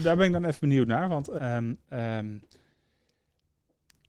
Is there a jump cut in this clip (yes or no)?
yes